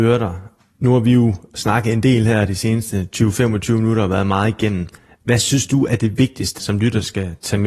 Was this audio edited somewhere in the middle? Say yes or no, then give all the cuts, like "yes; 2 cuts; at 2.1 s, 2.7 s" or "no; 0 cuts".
yes; 1 cut; at 6.6 s